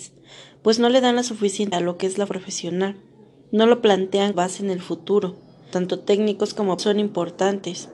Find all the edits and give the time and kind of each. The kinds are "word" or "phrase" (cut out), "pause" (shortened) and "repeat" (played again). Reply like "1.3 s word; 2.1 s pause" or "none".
1.7 s word; 2.3 s word; 4.3 s word; 5.7 s word; 6.8 s word